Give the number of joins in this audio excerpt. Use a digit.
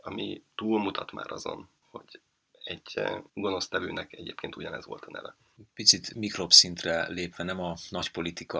2